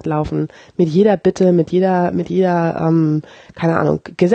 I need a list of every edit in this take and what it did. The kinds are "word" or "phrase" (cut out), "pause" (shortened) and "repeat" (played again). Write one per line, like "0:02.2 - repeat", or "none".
none